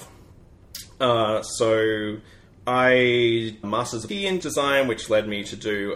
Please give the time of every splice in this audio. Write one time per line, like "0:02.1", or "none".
0:03.6
0:04.1
0:04.4